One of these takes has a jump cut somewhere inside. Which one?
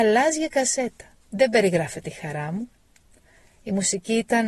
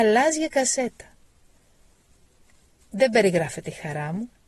first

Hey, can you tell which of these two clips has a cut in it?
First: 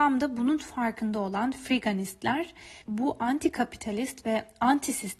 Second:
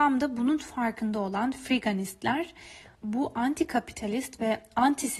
first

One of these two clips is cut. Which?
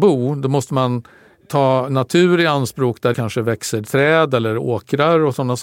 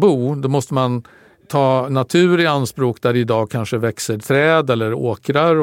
first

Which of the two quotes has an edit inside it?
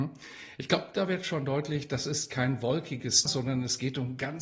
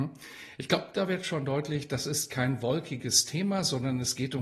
first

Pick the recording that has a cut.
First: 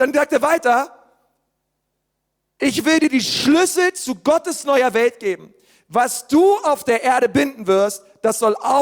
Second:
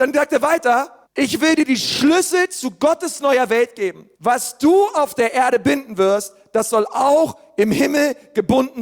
second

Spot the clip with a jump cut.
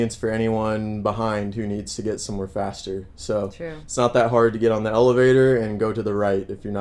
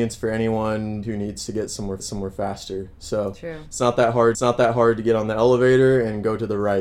second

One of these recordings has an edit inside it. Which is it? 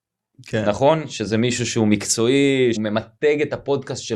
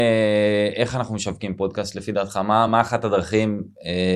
first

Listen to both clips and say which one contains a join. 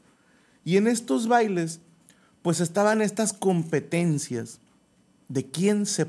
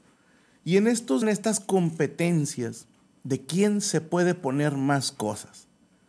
second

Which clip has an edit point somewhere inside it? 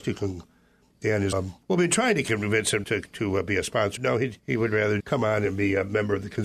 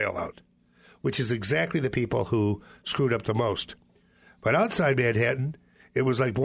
first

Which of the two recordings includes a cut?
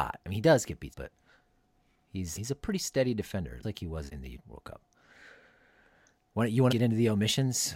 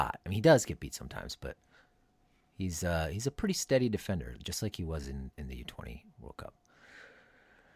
first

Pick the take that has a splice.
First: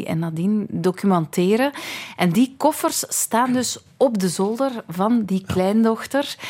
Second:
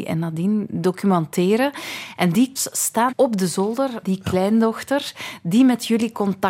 second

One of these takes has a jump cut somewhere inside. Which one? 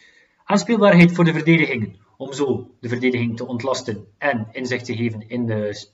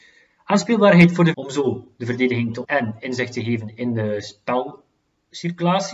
second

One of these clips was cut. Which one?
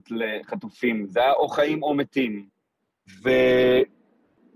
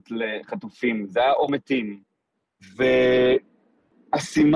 second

